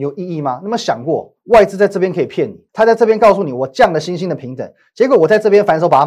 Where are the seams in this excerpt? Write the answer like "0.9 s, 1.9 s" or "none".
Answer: 1.4 s, 2.7 s